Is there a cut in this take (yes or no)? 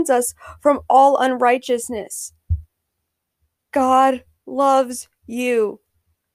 no